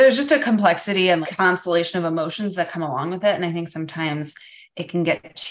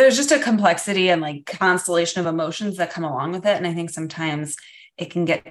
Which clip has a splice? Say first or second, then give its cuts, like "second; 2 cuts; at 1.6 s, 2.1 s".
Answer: first; 1 cut; at 1.2 s